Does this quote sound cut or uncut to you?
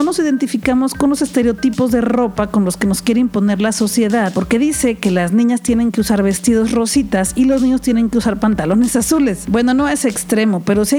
uncut